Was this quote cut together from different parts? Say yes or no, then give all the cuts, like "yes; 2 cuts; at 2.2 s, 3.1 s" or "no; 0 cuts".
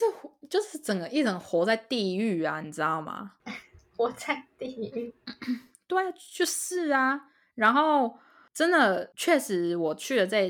no; 0 cuts